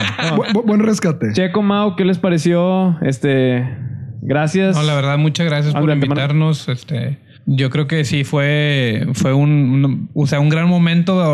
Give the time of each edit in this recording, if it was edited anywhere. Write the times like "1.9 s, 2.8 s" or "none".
7.4 s